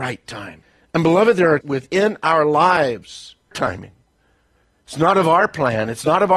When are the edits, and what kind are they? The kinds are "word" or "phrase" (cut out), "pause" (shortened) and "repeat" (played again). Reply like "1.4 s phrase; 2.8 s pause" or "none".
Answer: 1.6 s phrase; 3.5 s phrase